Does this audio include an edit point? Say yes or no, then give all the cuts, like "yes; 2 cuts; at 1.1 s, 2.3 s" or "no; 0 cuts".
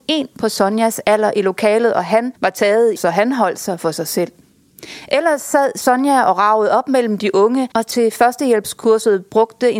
yes; 3 cuts; at 2.3 s, 3.0 s, 7.7 s